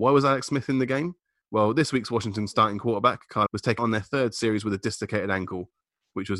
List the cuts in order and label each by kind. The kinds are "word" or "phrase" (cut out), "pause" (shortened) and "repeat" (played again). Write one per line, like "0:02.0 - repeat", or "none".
0:03.5 - word
0:03.8 - word